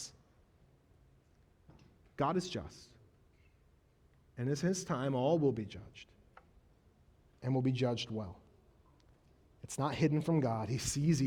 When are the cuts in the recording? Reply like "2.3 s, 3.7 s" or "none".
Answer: none